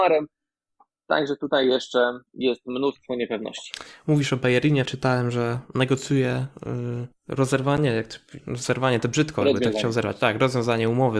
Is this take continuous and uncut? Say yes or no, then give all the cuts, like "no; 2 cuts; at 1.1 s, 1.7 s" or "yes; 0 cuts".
no; 4 cuts; at 2.3 s, 4.9 s, 7.1 s, 8.4 s